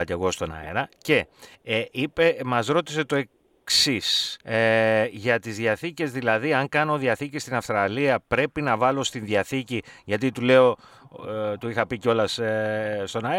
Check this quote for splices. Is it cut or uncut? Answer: cut